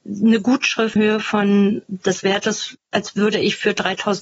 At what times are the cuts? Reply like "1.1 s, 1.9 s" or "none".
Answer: 1.0 s